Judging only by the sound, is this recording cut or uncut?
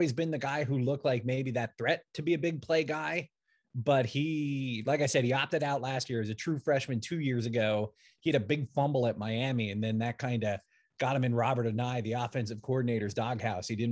uncut